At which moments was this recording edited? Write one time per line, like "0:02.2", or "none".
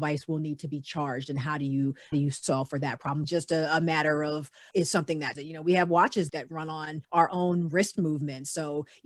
0:02.1
0:03.2
0:04.7
0:05.3
0:06.3
0:07.0